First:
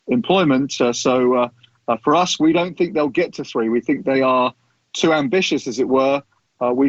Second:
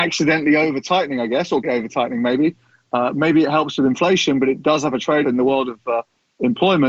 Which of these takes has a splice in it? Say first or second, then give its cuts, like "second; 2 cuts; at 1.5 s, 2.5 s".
second; 2 cuts; at 1.6 s, 5.2 s